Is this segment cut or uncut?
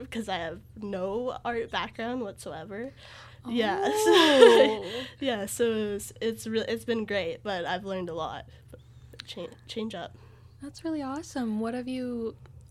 uncut